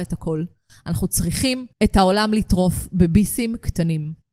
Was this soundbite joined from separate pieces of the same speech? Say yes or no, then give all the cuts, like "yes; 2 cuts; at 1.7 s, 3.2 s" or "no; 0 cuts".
yes; 1 cut; at 1.7 s